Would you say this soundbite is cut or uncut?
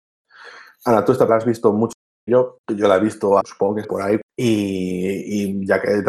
cut